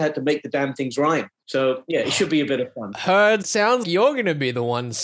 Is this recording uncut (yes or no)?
no